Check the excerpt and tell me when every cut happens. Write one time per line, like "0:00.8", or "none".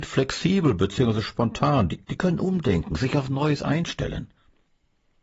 0:02.0